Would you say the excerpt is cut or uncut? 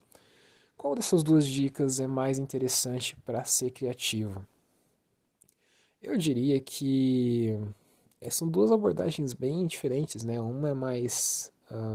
uncut